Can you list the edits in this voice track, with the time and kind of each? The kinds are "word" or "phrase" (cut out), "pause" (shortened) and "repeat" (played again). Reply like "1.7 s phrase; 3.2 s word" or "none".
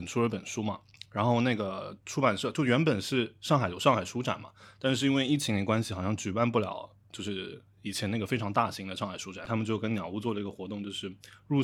none